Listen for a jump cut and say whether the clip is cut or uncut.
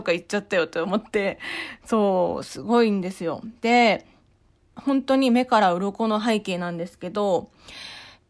uncut